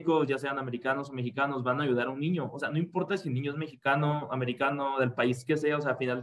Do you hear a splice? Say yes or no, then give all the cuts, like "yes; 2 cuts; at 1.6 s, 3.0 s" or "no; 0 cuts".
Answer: no; 0 cuts